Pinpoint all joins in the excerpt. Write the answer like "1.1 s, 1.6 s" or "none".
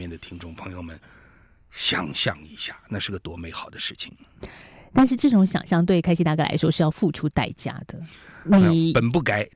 none